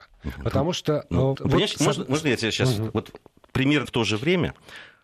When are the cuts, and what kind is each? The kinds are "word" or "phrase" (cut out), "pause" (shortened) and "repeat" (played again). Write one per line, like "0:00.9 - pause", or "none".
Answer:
0:01.3 - word
0:01.8 - word
0:03.8 - word

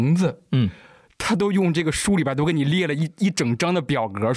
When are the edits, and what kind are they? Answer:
none

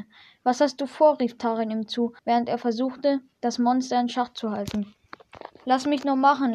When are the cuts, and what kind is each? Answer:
0:02.2 - pause

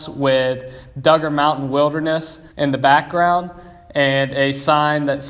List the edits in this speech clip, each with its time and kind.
0:02.5 - pause

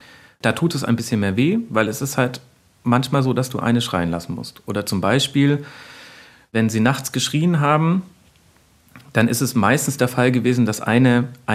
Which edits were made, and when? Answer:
none

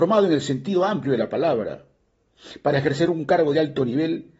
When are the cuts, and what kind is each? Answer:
none

